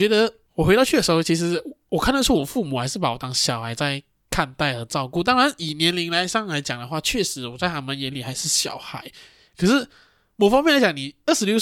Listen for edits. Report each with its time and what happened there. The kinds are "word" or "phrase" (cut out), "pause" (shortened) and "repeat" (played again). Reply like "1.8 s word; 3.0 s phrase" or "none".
none